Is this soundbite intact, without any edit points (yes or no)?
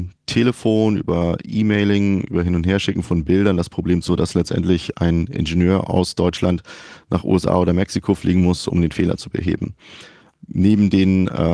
no